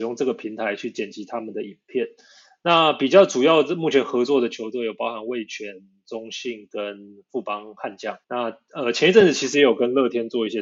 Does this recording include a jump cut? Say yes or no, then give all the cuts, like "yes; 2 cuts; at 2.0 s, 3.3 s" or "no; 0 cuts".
yes; 1 cut; at 8.2 s